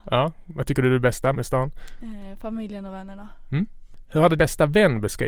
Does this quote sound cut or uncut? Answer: cut